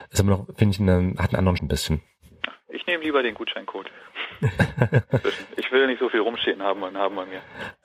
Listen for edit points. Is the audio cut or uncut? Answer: cut